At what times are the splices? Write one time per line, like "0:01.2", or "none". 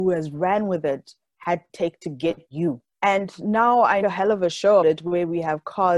0:01.7
0:02.5
0:02.9
0:04.0
0:04.8